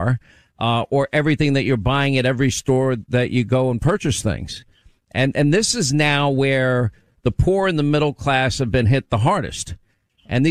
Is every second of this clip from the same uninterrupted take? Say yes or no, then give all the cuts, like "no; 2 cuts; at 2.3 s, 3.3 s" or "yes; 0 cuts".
yes; 0 cuts